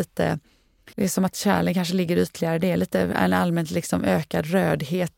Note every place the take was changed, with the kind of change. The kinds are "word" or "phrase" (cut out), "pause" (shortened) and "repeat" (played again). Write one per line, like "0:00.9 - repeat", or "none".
0:00.9 - pause